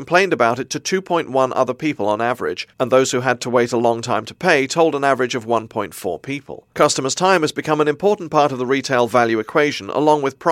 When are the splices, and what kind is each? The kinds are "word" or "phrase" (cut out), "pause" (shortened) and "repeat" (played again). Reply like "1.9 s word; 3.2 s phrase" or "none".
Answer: 2.7 s pause; 6.7 s pause